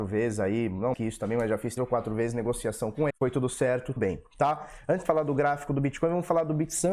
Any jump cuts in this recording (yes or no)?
yes